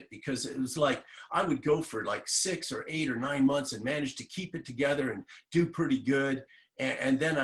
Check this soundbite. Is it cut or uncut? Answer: uncut